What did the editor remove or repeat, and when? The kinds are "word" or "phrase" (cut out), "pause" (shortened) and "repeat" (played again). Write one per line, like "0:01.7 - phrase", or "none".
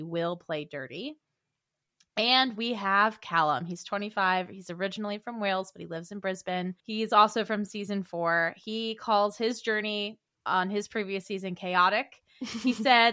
0:06.8 - pause